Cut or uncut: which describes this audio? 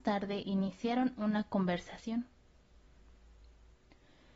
uncut